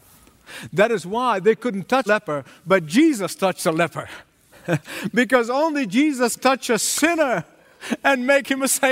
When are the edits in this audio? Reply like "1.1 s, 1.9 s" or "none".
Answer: 2.1 s, 4.3 s, 6.4 s